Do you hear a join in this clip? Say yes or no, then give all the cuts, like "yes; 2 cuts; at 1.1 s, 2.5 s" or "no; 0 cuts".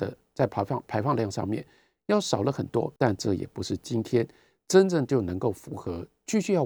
yes; 1 cut; at 3.0 s